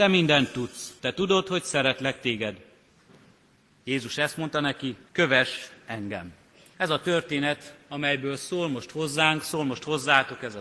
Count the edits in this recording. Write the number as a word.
three